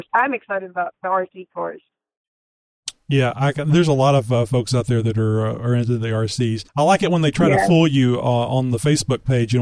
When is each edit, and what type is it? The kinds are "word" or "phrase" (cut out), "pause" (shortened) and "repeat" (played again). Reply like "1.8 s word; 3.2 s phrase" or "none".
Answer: 6.7 s pause